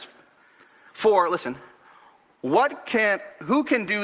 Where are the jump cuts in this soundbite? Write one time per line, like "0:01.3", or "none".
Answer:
none